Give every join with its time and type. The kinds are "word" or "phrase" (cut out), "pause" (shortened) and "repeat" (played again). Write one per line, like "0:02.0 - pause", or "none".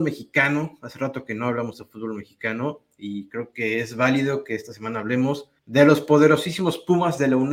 0:05.6 - pause